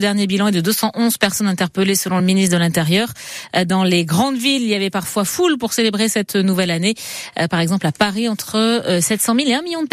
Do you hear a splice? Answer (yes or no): no